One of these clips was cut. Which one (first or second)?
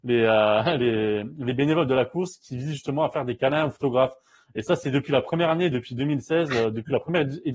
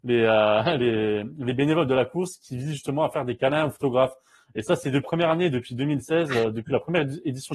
second